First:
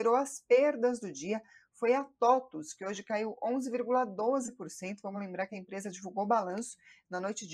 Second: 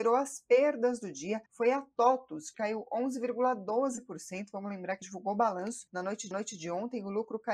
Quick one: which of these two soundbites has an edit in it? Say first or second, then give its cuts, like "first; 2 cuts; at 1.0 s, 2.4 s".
second; 5 cuts; at 1.5 s, 2.5 s, 5.0 s, 5.9 s, 6.3 s